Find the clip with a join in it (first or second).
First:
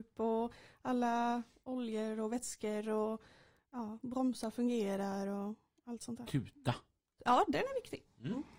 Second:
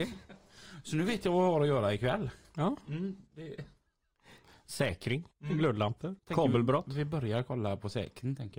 second